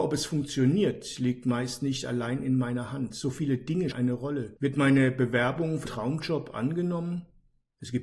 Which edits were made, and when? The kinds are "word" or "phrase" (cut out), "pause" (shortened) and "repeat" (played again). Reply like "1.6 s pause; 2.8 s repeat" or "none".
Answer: 3.9 s word; 4.6 s pause; 5.9 s word